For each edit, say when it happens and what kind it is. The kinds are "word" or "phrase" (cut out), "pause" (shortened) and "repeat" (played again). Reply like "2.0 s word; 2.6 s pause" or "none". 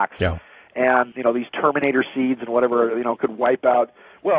1.1 s word